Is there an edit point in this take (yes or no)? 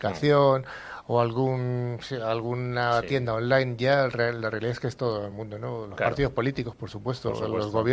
no